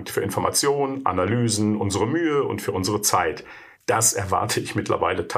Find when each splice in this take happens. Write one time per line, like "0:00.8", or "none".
0:03.7